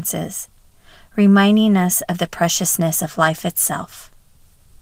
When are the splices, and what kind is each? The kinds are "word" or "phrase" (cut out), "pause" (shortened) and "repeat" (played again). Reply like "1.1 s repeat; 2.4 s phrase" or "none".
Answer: none